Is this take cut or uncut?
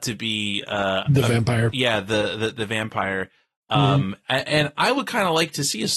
uncut